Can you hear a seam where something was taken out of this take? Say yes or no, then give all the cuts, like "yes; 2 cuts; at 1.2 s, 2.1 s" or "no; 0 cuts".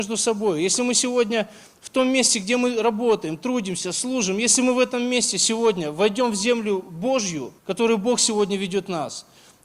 yes; 1 cut; at 7.6 s